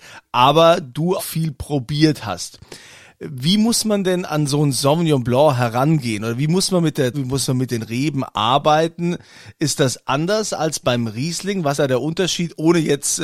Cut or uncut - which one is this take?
cut